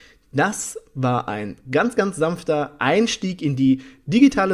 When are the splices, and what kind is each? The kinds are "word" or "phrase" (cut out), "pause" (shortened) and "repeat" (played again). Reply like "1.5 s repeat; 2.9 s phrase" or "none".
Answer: none

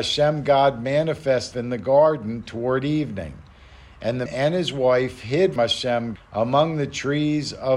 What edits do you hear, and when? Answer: 1.5 s word; 4.3 s word; 5.6 s word; 6.2 s word

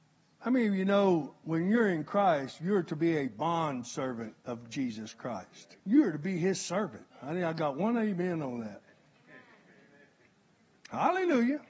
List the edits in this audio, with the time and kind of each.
5.8 s pause; 7.1 s pause

